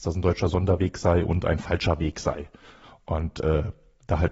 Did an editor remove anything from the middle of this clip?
no; 0 cuts

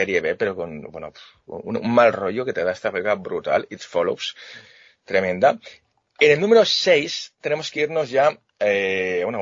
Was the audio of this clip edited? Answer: no; 0 cuts

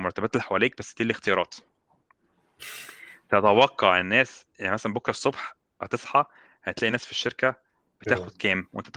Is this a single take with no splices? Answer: yes; 0 cuts

